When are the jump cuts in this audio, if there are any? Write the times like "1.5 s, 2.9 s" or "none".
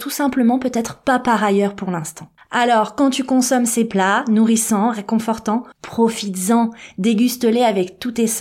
2.4 s, 5.7 s

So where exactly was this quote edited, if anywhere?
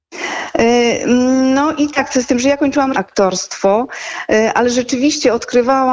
1.9 s, 2.9 s

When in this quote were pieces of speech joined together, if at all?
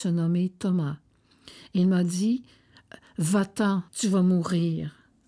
3.9 s

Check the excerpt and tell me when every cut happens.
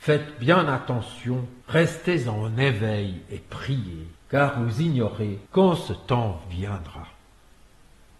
1.6 s, 4.1 s, 5.5 s

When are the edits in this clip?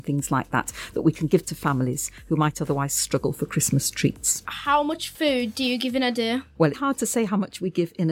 6.7 s

